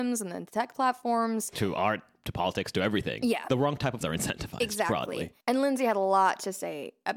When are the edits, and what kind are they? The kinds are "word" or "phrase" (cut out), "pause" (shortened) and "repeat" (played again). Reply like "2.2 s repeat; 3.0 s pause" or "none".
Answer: 4.0 s word; 5.4 s pause